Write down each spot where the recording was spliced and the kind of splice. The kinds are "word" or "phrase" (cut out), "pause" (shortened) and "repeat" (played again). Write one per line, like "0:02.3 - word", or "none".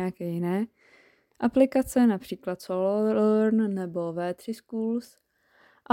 none